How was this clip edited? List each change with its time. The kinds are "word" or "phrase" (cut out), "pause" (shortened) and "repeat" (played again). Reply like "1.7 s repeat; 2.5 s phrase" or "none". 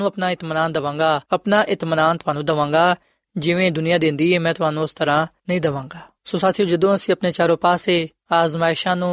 1.2 s pause; 6.2 s pause